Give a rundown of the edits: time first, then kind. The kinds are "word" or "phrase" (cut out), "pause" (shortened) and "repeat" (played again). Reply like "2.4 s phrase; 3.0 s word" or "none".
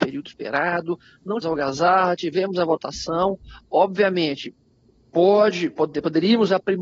1.4 s word